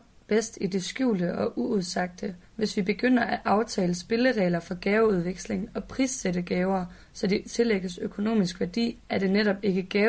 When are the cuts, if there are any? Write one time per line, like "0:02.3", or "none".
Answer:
none